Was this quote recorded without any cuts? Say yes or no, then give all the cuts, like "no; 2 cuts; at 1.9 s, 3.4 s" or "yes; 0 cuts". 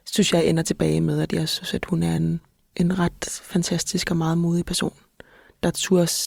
yes; 0 cuts